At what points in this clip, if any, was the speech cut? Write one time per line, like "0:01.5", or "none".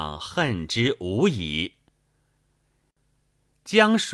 none